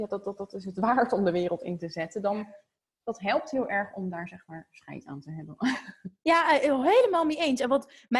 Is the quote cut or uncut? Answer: uncut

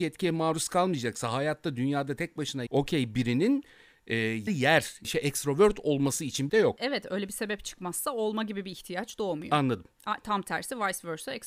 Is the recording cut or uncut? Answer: cut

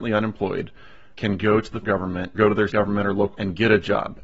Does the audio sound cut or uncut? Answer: cut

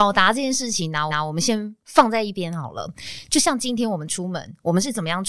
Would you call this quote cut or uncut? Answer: cut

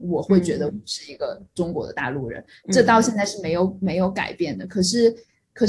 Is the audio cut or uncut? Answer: uncut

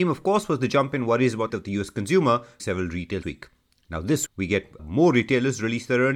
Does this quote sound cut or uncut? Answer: cut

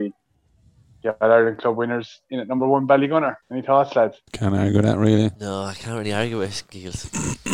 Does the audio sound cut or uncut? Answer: cut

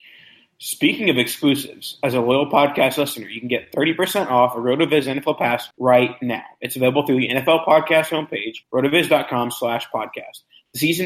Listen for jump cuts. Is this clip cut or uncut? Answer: cut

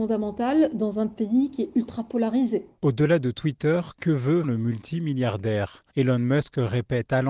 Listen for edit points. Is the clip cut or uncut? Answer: cut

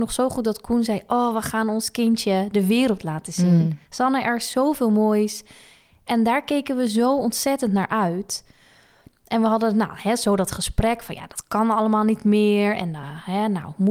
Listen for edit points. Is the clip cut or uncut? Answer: uncut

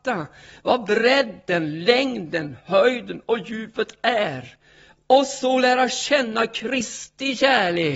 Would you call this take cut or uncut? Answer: uncut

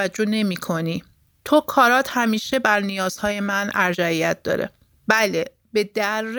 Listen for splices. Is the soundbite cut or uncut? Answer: uncut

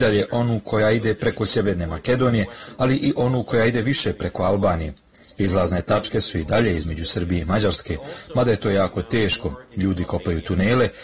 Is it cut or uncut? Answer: uncut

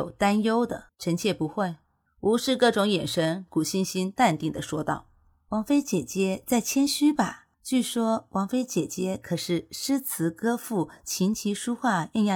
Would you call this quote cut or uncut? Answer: cut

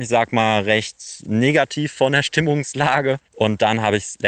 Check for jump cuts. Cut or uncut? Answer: cut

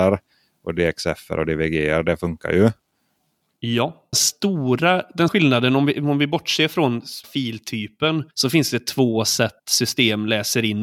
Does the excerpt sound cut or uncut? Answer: cut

